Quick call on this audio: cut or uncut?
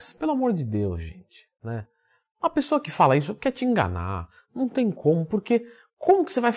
cut